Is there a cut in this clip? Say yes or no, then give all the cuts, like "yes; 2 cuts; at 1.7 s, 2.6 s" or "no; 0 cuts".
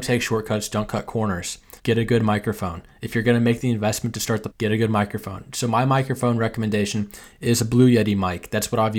yes; 2 cuts; at 1.8 s, 4.5 s